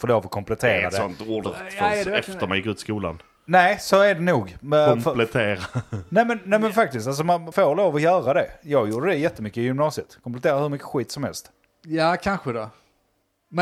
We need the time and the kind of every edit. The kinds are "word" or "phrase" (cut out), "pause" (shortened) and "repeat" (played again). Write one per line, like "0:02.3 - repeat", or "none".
0:01.5 - phrase
0:03.4 - pause
0:07.5 - word